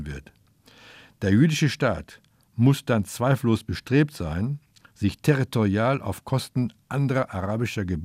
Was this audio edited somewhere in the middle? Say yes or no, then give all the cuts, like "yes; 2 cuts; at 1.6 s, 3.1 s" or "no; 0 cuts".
no; 0 cuts